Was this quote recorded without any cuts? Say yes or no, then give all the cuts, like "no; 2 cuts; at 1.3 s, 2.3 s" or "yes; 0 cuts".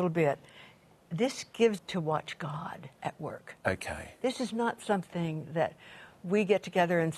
no; 2 cuts; at 1.8 s, 2.9 s